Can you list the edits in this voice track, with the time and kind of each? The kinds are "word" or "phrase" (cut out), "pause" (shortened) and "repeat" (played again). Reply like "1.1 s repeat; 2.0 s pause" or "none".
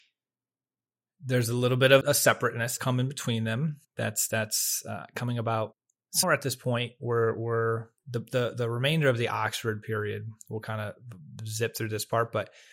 2.0 s word; 2.8 s word; 3.8 s pause; 6.2 s word; 8.0 s pause